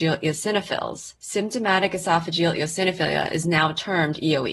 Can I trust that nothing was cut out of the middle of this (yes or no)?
no